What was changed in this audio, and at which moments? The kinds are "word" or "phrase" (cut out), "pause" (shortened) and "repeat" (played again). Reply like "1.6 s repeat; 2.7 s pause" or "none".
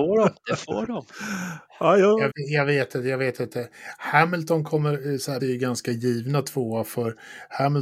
2.3 s word; 5.4 s word